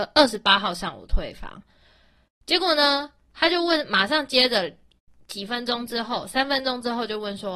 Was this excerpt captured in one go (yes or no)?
yes